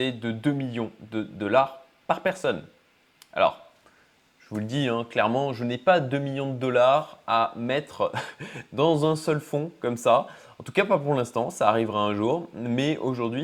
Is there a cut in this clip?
no; 0 cuts

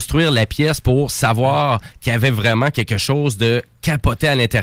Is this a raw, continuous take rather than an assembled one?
yes; 0 cuts

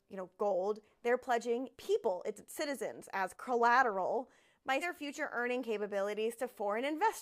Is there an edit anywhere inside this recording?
yes; 4 cuts; at 1.7 s, 2.4 s, 3.3 s, 4.8 s

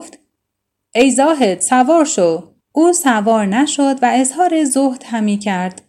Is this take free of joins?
no; 1 cut; at 2.6 s

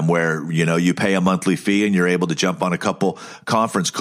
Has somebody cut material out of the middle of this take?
no; 0 cuts

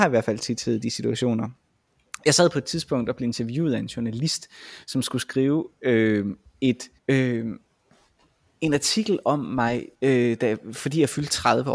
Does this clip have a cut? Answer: yes; 2 cuts; at 7.0 s, 9.9 s

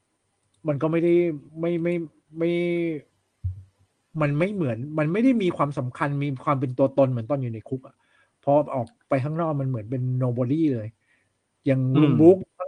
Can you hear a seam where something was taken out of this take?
yes; 1 cut; at 1.5 s

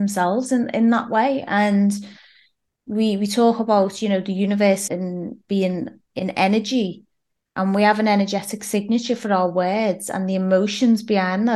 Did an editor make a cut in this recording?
yes; 1 cut; at 4.9 s

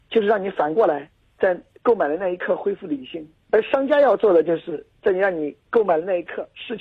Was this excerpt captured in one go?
yes; 0 cuts

